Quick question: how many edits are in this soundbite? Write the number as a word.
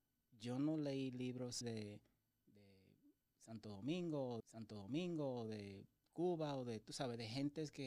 two